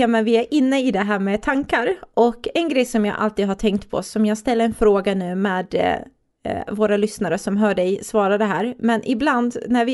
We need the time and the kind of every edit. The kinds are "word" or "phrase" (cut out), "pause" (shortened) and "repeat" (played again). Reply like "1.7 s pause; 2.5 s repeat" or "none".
none